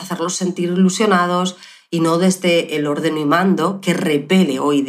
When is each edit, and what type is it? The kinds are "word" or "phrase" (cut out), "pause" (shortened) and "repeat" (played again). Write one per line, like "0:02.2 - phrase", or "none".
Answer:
none